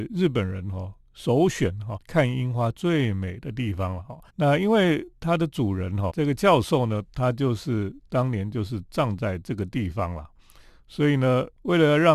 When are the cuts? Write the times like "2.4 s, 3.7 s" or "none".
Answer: 2.0 s, 4.3 s, 6.1 s